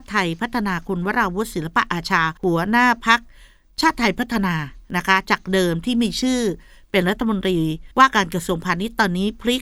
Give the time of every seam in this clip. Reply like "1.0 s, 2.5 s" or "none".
2.4 s, 7.9 s